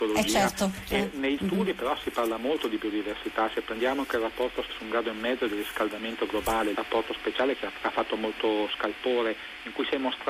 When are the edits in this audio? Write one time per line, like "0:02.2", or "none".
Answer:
0:01.4
0:04.7
0:06.7
0:07.8